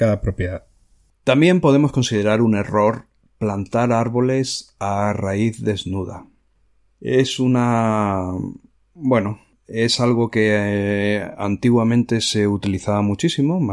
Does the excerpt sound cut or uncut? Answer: uncut